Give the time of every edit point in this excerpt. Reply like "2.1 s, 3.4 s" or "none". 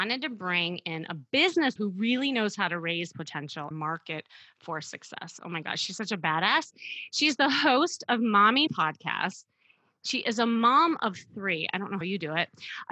1.8 s, 3.1 s, 3.7 s, 8.7 s, 12.0 s